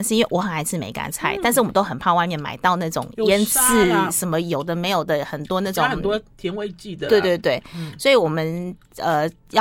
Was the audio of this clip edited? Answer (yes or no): no